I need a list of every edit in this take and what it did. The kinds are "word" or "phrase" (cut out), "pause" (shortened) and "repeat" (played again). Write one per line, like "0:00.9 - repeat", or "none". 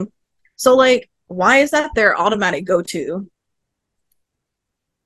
none